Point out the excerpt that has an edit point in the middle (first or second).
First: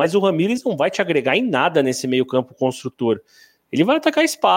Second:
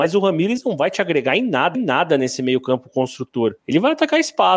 second